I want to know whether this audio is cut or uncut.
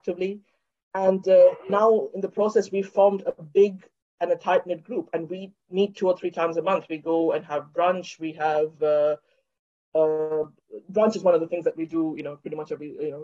uncut